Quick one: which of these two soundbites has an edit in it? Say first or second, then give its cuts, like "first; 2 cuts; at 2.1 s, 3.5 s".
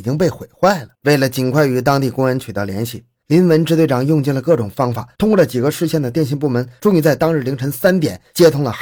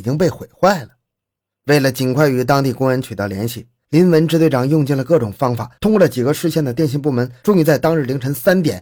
first; 1 cut; at 0.9 s